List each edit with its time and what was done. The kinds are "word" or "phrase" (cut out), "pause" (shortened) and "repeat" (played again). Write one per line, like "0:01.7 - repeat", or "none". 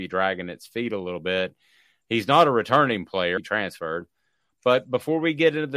0:03.4 - word